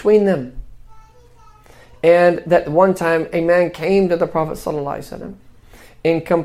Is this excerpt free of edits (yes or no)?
yes